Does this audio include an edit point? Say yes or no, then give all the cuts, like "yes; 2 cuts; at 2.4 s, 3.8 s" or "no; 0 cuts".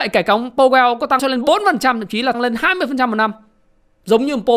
yes; 2 cuts; at 1.2 s, 2.3 s